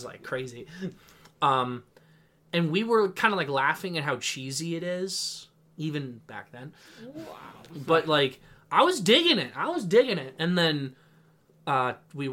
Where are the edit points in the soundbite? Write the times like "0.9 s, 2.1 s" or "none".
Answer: none